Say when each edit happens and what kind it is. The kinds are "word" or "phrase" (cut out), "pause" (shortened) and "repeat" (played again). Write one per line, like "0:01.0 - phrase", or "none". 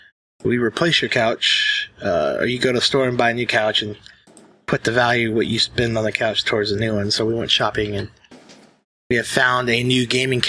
none